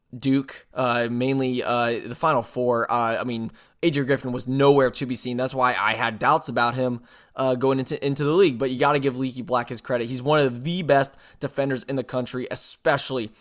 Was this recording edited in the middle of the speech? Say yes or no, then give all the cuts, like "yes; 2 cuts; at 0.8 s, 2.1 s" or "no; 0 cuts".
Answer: no; 0 cuts